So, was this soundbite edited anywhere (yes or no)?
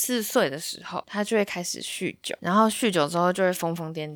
no